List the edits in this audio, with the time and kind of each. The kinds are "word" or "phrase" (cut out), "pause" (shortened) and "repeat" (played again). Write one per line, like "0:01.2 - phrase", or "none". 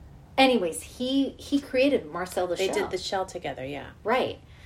none

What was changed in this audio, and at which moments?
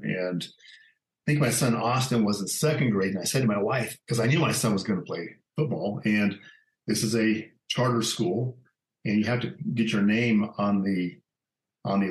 0:04.0 - pause
0:05.5 - pause
0:07.6 - pause

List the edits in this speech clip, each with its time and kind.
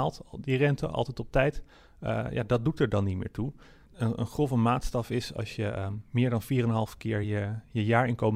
none

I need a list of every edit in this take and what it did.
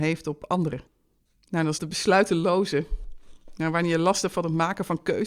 0:01.8 - phrase

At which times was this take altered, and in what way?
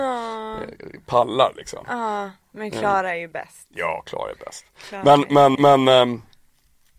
0:05.6 - repeat

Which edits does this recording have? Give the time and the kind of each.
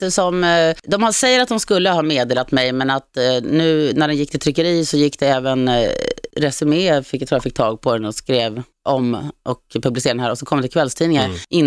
none

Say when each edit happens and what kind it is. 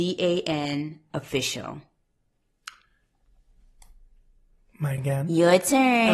0:05.0 - word

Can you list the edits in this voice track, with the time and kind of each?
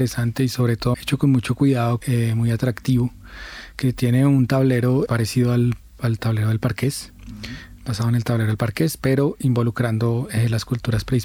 0:00.9 - word
0:02.0 - phrase
0:05.1 - word

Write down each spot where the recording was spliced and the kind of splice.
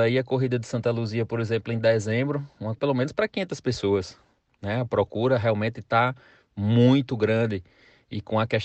0:02.8 - word

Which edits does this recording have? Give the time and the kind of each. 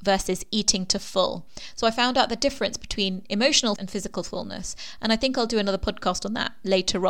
0:03.8 - word

